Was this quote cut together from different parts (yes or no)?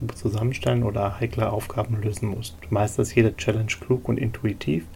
no